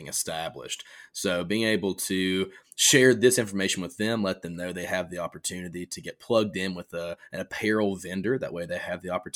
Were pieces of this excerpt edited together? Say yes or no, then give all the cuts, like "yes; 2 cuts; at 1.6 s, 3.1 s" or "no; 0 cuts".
no; 0 cuts